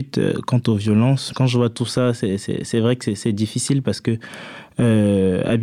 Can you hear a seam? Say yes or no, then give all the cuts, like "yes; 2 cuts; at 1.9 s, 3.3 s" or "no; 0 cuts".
no; 0 cuts